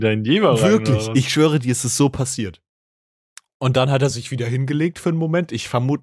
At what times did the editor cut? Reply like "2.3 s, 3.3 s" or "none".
none